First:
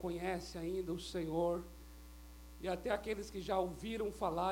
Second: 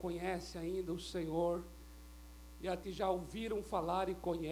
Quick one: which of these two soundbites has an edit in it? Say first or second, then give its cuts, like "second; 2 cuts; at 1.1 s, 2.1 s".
second; 1 cut; at 2.8 s